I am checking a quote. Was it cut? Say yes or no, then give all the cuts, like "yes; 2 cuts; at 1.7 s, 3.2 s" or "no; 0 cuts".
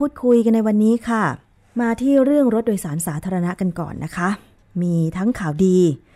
yes; 1 cut; at 1.5 s